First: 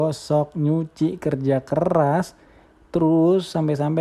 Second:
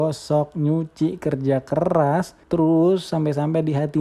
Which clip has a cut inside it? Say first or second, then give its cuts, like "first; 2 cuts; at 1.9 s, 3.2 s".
second; 1 cut; at 2.4 s